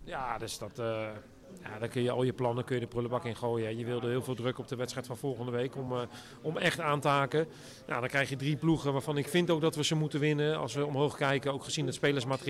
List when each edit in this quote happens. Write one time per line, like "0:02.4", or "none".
none